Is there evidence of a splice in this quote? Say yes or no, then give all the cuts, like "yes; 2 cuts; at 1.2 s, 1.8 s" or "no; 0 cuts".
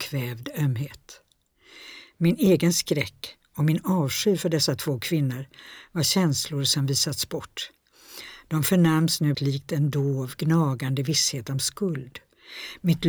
yes; 1 cut; at 9.3 s